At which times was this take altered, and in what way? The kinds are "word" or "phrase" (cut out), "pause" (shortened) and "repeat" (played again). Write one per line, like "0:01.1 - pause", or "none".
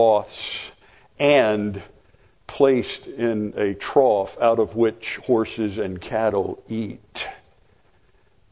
none